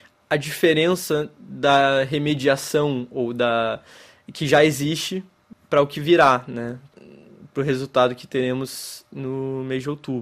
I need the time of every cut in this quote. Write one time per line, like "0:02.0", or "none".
none